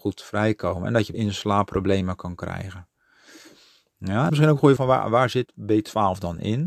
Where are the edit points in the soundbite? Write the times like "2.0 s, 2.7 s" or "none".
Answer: 1.1 s, 4.3 s, 4.8 s, 5.5 s